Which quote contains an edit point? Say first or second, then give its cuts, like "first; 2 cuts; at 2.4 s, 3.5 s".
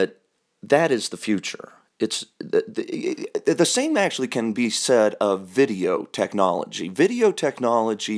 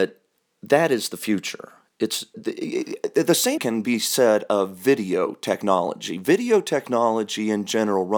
second; 2 cuts; at 2.3 s, 3.6 s